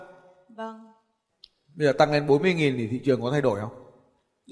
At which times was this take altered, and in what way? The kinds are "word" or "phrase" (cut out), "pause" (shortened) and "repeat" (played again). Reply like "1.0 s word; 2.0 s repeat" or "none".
none